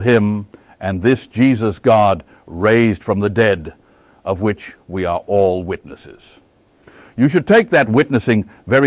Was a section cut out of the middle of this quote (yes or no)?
no